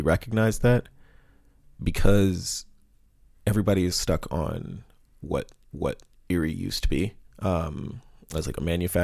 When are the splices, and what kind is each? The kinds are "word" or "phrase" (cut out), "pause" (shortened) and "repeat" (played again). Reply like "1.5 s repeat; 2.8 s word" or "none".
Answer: 3.9 s word; 5.7 s repeat; 7.3 s pause